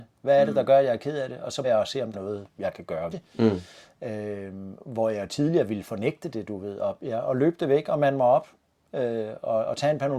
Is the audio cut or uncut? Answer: cut